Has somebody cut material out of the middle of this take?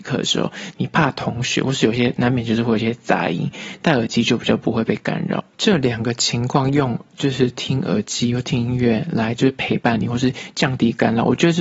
yes; 1 cut; at 5.5 s

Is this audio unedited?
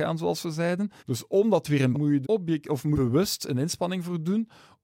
no; 4 cuts; at 1.0 s, 1.9 s, 2.2 s, 2.9 s

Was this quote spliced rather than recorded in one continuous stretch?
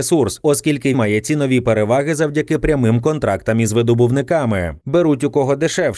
yes; 1 cut; at 0.9 s

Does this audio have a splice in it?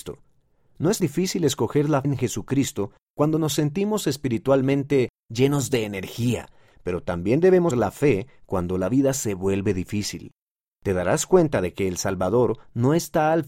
yes; 3 cuts; at 1.0 s, 2.0 s, 7.7 s

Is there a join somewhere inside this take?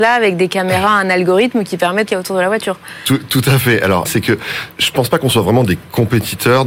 yes; 3 cuts; at 2.1 s, 4.0 s, 4.7 s

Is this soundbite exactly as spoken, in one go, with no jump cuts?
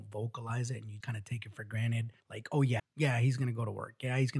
no; 3 cuts; at 1.0 s, 2.2 s, 2.8 s

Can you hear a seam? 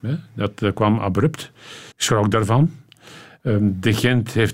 yes; 1 cut; at 1.9 s

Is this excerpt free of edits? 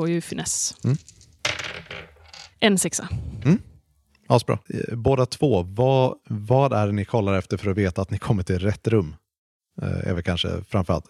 no; 3 cuts; at 2.5 s, 4.6 s, 6.2 s

